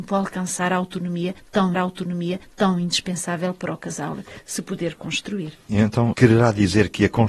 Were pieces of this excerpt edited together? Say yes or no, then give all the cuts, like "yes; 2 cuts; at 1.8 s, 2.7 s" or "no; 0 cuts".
yes; 1 cut; at 1.7 s